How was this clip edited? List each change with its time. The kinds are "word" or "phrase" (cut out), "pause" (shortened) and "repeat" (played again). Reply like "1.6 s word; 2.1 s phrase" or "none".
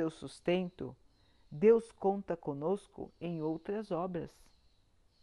none